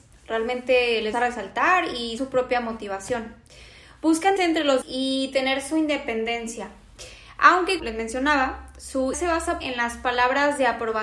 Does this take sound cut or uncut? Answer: cut